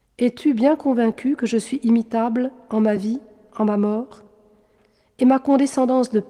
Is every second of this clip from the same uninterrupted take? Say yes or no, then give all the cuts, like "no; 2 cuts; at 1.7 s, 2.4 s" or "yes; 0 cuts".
yes; 0 cuts